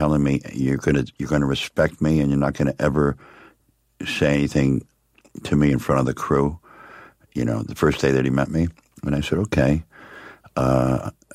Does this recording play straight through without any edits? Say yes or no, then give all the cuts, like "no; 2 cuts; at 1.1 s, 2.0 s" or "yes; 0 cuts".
yes; 0 cuts